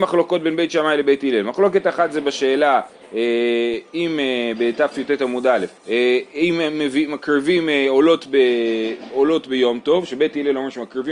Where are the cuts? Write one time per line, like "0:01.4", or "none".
0:05.8
0:09.1